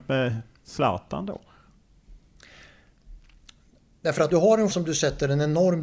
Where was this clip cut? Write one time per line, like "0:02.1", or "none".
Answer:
0:04.3
0:04.7